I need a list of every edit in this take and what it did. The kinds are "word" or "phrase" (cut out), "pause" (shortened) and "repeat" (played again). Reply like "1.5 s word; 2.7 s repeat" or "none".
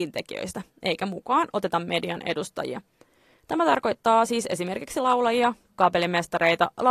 none